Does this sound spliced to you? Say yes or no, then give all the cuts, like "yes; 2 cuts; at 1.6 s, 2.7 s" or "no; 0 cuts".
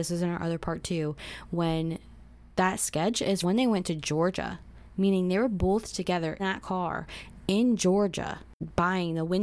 yes; 2 cuts; at 3.4 s, 6.4 s